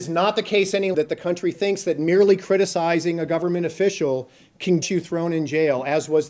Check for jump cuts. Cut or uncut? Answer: cut